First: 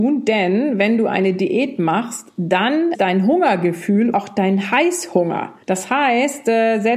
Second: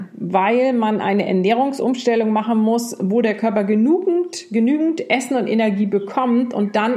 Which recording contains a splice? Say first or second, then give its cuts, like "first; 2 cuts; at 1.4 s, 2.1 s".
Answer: first; 3 cuts; at 2.9 s, 4.1 s, 5.6 s